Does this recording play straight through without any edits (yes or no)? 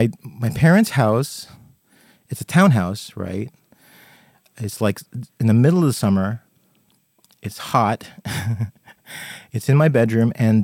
yes